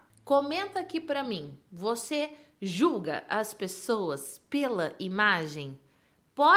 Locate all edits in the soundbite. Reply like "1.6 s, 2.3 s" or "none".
none